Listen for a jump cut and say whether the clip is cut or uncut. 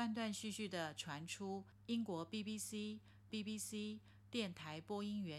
cut